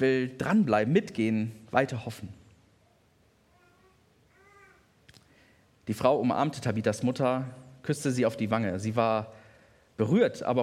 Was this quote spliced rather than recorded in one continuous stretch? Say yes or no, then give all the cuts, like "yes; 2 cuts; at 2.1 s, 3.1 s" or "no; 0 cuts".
no; 0 cuts